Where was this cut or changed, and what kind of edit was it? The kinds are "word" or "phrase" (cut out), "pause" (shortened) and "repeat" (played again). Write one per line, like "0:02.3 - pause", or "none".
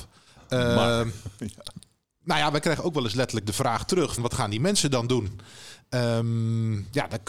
0:04.2 - word